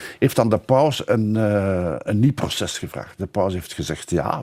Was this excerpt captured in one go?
no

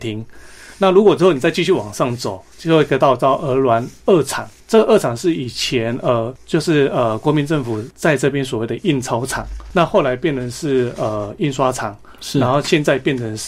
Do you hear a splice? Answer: yes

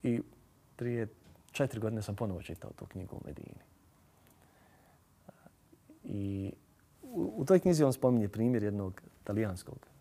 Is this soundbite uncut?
yes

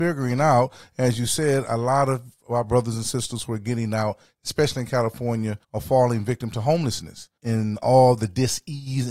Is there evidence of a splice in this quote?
yes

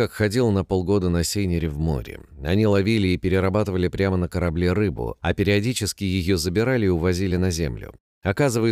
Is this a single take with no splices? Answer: yes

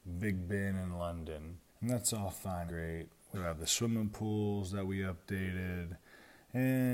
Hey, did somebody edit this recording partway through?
yes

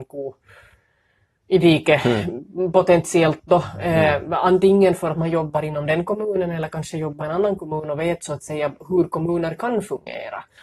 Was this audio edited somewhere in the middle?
yes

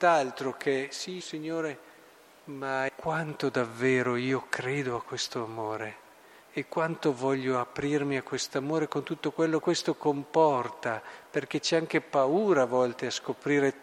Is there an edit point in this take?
yes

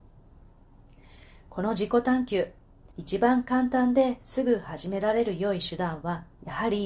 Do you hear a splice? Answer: yes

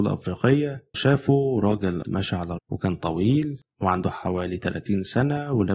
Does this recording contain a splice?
yes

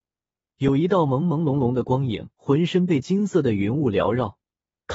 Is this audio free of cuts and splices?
no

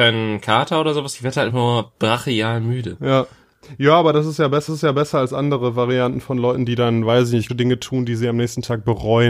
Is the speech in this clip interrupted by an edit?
yes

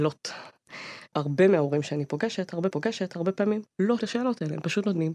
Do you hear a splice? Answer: yes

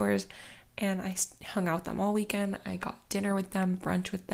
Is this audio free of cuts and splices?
yes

